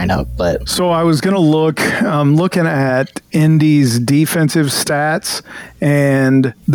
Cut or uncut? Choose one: uncut